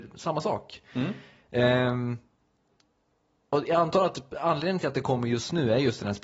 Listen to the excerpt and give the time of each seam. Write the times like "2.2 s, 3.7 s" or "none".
none